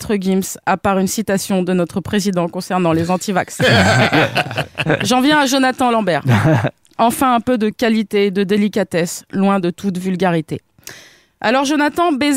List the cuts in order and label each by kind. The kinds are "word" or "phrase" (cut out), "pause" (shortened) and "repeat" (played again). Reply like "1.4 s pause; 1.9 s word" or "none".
none